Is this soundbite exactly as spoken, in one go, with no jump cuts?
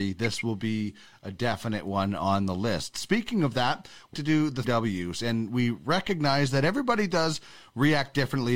no; 2 cuts; at 4.1 s, 4.6 s

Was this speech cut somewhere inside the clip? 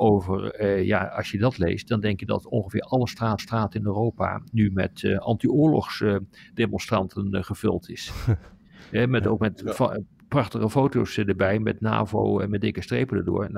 yes; 1 cut; at 3.4 s

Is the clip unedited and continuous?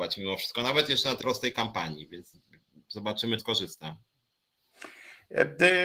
no; 2 cuts; at 1.2 s, 3.4 s

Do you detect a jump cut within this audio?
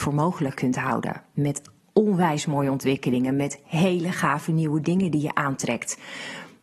no; 0 cuts

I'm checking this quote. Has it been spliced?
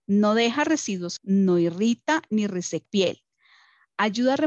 yes; 2 cuts; at 1.2 s, 2.8 s

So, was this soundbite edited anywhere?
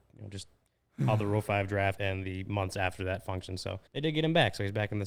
yes; 2 cuts; at 2.0 s, 3.9 s

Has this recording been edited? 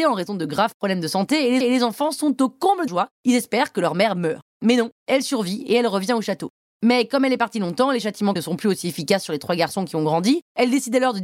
yes; 3 cuts; at 1.6 s, 2.9 s, 8.4 s

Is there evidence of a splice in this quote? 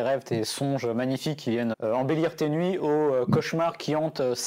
yes; 1 cut; at 1.7 s

